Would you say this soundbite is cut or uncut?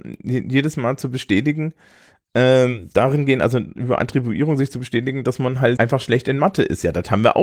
cut